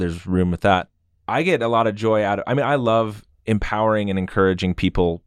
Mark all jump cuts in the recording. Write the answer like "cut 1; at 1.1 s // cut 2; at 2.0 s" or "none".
none